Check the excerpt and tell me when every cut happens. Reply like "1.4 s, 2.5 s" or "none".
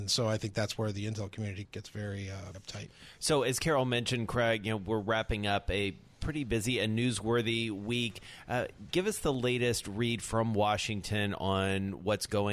1.6 s, 2.5 s